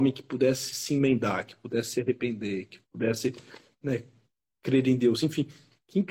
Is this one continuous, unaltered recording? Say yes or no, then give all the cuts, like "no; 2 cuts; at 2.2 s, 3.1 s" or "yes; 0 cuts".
yes; 0 cuts